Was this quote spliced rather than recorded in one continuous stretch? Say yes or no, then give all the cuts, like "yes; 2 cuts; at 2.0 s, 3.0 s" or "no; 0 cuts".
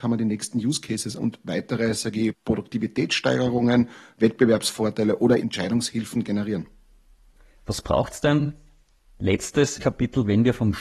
yes; 4 cuts; at 1.2 s, 2.3 s, 5.4 s, 9.8 s